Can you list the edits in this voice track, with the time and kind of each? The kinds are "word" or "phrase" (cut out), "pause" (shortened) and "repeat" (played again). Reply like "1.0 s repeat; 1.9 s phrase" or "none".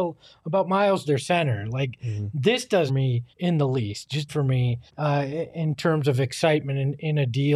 1.1 s phrase; 2.9 s phrase; 3.3 s pause; 4.3 s word; 4.9 s pause